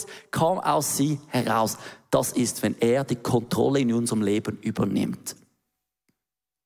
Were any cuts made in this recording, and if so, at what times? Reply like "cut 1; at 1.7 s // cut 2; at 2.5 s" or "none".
none